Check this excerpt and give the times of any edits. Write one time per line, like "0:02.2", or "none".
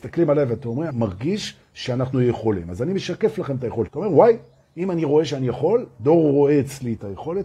0:00.9
0:03.9